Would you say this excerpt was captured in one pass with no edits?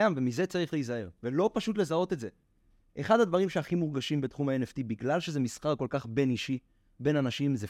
yes; 0 cuts

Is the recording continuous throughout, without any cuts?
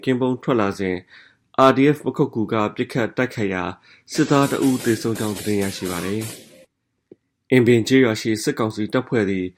yes; 0 cuts

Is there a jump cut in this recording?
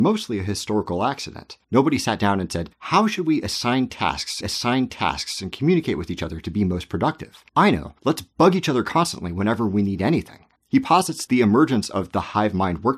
yes; 7 cuts; at 1.6 s, 2.7 s, 4.4 s, 7.5 s, 8.0 s, 10.6 s, 11.3 s

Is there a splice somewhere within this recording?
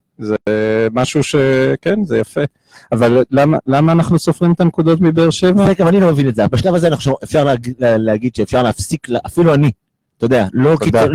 no; 0 cuts

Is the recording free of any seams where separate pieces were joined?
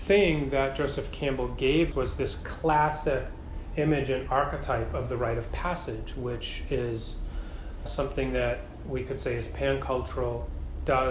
no; 3 cuts; at 1.9 s, 7.9 s, 8.8 s

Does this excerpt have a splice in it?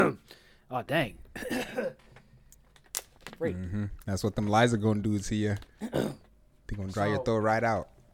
no; 0 cuts

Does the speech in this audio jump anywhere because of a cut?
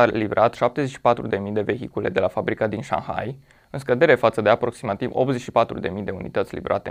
no; 0 cuts

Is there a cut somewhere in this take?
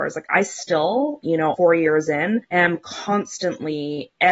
yes; 3 cuts; at 1.2 s, 1.5 s, 2.4 s

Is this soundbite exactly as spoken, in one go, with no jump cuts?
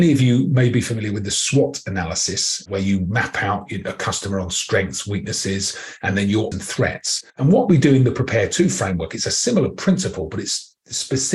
no; 2 cuts; at 6.5 s, 7.3 s

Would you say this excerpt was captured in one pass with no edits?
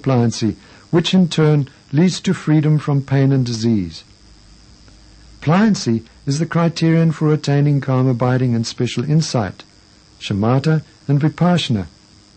yes; 0 cuts

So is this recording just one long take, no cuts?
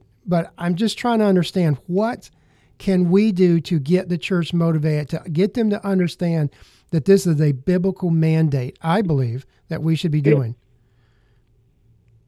yes; 0 cuts

